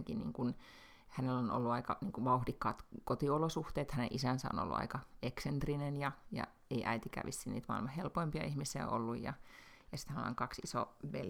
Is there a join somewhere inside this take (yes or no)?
no